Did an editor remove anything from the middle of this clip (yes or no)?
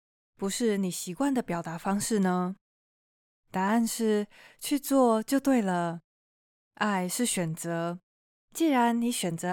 no